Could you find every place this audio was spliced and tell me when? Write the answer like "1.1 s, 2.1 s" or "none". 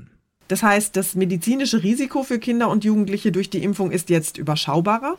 none